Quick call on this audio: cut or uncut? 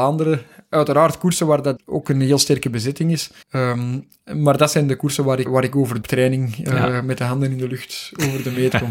cut